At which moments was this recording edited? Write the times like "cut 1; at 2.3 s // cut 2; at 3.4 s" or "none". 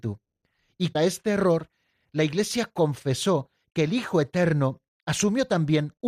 cut 1; at 0.9 s